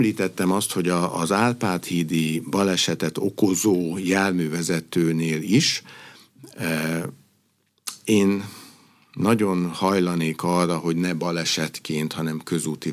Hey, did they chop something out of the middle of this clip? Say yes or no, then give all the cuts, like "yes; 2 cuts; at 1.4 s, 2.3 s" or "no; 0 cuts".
no; 0 cuts